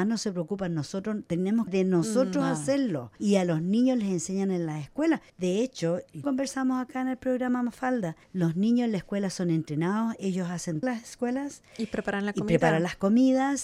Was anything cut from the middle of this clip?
yes; 6 cuts; at 1.7 s, 3.2 s, 5.3 s, 6.2 s, 8.2 s, 10.8 s

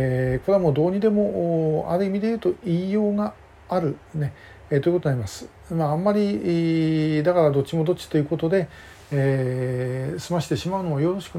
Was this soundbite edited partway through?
yes; 1 cut; at 4.1 s

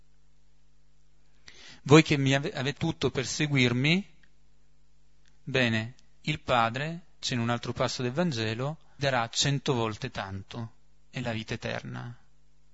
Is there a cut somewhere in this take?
yes; 3 cuts; at 2.8 s, 7.2 s, 9.0 s

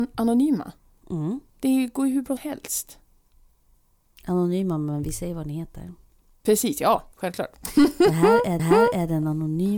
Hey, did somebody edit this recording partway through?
yes; 4 cuts; at 1.5 s, 2.4 s, 7.1 s, 8.6 s

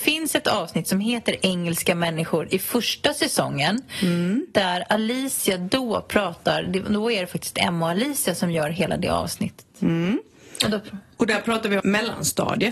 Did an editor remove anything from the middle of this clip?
yes; 1 cut; at 11.8 s

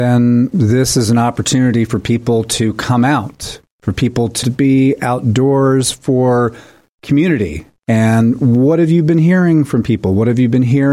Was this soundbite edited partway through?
yes; 2 cuts; at 4.4 s, 7.8 s

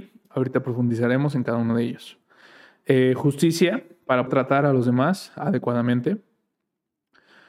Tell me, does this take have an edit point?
yes; 1 cut; at 4.3 s

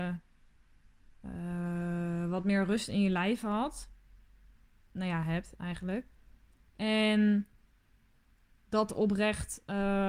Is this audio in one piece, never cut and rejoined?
yes; 0 cuts

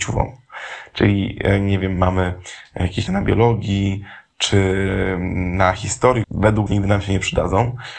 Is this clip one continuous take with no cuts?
no; 3 cuts; at 3.1 s, 6.2 s, 6.7 s

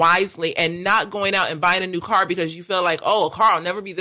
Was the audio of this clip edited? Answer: no; 0 cuts

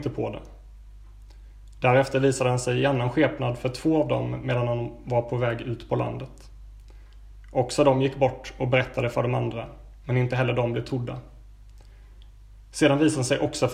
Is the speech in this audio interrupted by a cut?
no; 0 cuts

